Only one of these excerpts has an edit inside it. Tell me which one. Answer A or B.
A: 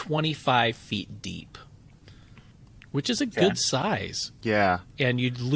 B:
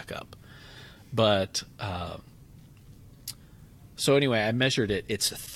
A